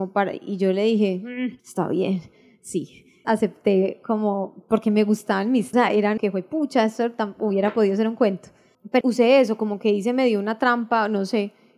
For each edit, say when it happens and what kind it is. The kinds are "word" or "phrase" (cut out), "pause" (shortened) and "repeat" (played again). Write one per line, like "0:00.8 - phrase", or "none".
0:01.6 - pause
0:03.2 - word
0:05.7 - phrase
0:06.2 - phrase
0:09.0 - word